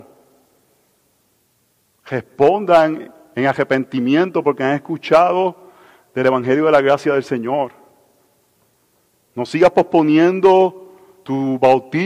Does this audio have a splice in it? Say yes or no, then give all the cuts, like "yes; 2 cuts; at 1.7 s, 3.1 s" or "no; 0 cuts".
no; 0 cuts